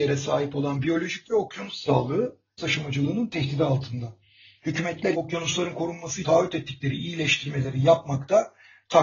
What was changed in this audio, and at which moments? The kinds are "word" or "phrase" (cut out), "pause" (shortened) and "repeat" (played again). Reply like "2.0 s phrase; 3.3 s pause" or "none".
1.2 s word; 2.6 s word; 5.1 s word; 6.2 s word